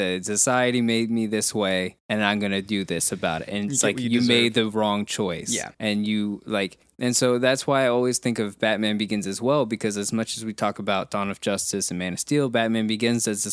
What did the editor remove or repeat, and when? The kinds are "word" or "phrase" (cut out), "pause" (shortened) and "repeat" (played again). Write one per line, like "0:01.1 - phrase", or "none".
0:02.0 - pause
0:05.7 - pause
0:06.8 - pause